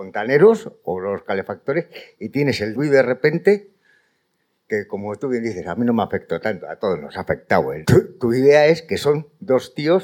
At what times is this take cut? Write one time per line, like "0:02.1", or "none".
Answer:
0:02.7
0:07.8